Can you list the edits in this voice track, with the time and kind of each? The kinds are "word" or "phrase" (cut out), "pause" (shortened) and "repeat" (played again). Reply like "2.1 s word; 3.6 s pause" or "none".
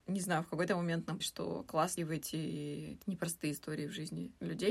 1.2 s word; 2.0 s word